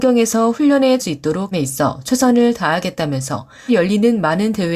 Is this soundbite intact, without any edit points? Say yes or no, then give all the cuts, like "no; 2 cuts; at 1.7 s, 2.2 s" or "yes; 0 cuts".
no; 3 cuts; at 1.0 s, 1.5 s, 3.7 s